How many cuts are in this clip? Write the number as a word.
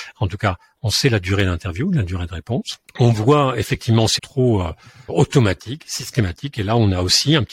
three